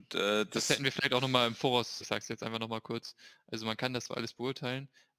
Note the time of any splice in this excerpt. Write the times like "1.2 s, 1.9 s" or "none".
2.0 s